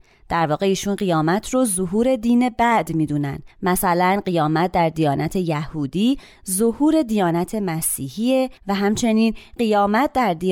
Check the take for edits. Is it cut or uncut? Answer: cut